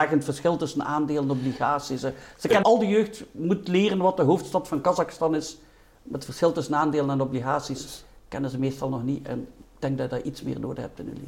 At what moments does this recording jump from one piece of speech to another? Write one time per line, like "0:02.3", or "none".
0:02.6